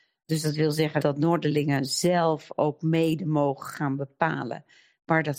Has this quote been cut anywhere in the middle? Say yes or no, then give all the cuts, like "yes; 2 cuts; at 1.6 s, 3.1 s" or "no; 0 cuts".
no; 0 cuts